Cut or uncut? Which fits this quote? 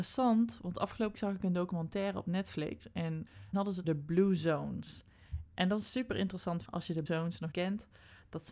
cut